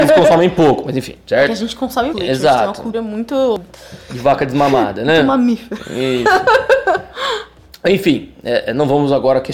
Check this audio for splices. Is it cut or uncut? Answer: cut